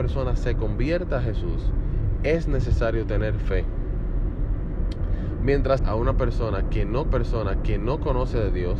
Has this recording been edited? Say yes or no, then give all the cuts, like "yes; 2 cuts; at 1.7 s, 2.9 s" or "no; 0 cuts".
yes; 2 cuts; at 5.8 s, 7.1 s